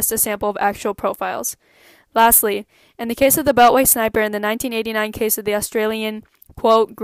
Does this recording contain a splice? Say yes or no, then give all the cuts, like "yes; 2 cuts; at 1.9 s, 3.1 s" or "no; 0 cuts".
no; 0 cuts